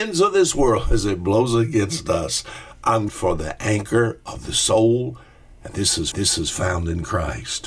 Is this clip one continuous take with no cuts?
no; 2 cuts; at 3.1 s, 6.1 s

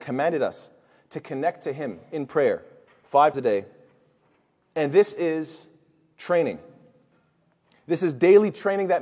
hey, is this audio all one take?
no; 1 cut; at 3.3 s

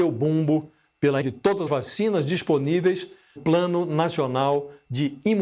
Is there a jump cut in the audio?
yes; 3 cuts; at 1.2 s, 1.7 s, 3.4 s

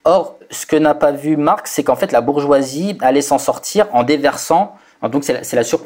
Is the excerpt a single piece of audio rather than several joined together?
yes; 0 cuts

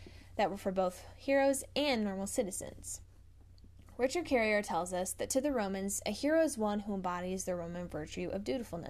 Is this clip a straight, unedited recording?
yes; 0 cuts

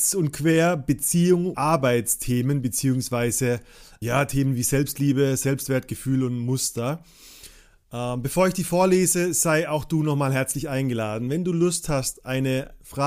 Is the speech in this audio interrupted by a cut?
yes; 2 cuts; at 1.5 s, 4.0 s

